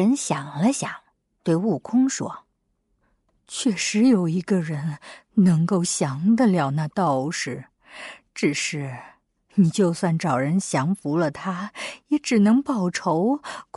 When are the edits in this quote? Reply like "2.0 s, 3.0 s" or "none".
none